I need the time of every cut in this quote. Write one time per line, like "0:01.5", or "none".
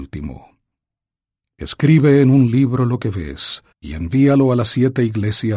0:03.7